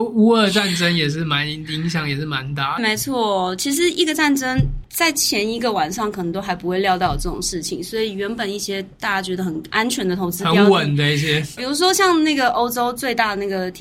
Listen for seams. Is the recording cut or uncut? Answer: cut